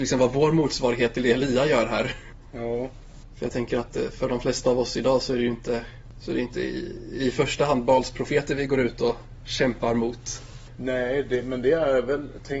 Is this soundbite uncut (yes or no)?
yes